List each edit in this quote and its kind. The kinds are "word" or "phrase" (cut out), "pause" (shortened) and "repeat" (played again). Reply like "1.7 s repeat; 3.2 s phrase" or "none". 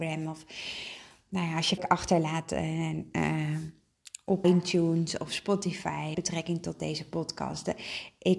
1.8 s word; 4.4 s word; 6.1 s word

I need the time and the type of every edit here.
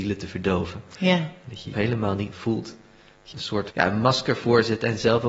1.7 s word; 2.3 s word; 3.3 s word; 3.7 s word

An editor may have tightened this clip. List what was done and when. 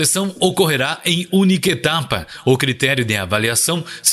none

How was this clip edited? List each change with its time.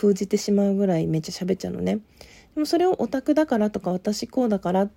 none

